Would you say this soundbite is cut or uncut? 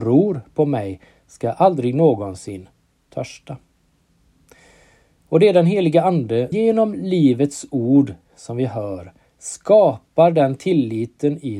cut